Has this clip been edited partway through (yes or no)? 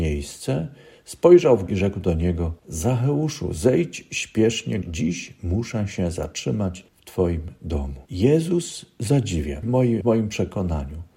yes